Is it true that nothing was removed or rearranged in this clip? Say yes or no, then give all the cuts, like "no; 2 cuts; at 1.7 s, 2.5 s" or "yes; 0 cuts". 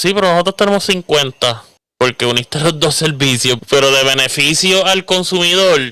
no; 2 cuts; at 1.9 s, 3.6 s